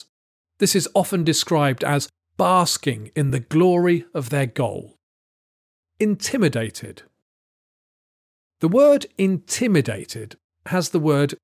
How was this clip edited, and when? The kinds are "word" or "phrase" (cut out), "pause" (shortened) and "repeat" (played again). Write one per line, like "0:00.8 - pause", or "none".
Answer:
none